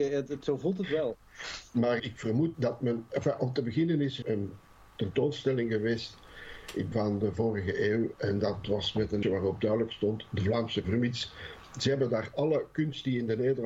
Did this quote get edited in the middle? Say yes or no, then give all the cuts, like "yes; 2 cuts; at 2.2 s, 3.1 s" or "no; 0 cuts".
yes; 6 cuts; at 2.0 s, 2.5 s, 4.2 s, 6.9 s, 9.2 s, 10.8 s